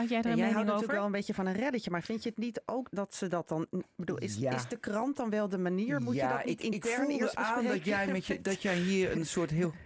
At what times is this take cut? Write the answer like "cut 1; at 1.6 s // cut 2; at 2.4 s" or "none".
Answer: cut 1; at 2.9 s